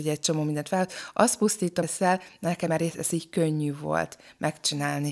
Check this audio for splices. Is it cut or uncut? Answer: cut